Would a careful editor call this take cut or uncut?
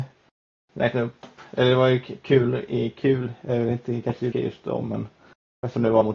cut